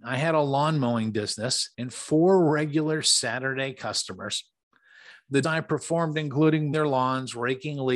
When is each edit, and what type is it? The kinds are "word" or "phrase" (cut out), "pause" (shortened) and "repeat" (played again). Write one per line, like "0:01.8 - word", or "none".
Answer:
0:01.7 - pause
0:05.4 - word
0:06.7 - word